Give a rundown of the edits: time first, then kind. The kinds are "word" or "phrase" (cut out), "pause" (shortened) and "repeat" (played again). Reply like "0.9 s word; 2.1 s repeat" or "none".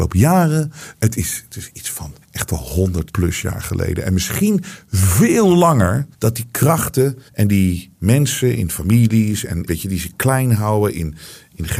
2.2 s pause; 3.1 s word; 6.1 s pause; 7.3 s pause; 9.7 s word